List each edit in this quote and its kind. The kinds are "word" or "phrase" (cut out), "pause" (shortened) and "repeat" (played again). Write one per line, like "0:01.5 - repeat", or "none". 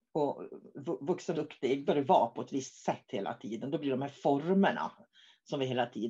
0:01.3 - word
0:01.9 - word